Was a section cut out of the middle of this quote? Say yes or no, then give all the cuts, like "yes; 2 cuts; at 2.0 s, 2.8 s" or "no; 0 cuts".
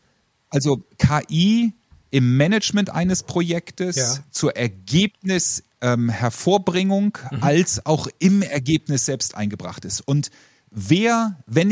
no; 0 cuts